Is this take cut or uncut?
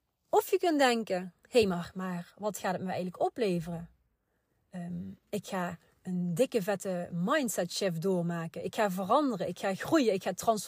uncut